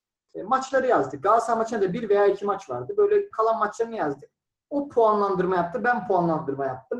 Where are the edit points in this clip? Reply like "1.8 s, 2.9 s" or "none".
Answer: 3.3 s